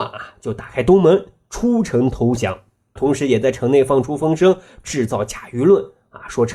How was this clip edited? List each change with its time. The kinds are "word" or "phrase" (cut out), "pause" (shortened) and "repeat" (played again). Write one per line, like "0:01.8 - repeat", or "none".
0:03.0 - word